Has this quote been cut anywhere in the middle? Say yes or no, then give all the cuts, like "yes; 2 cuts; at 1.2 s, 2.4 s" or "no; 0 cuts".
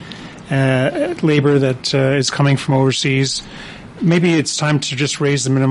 no; 0 cuts